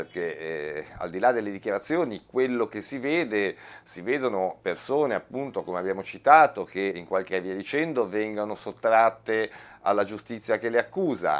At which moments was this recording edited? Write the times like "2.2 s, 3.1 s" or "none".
6.9 s, 7.3 s